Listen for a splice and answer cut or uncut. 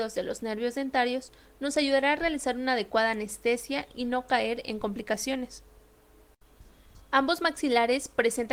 uncut